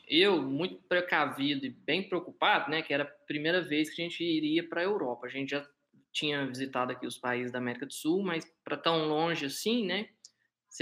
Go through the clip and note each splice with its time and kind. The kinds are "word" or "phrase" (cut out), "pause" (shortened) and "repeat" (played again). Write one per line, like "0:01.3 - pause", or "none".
none